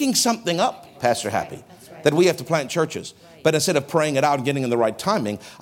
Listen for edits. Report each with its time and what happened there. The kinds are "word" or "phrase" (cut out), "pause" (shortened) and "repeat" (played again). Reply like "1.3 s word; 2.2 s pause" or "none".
none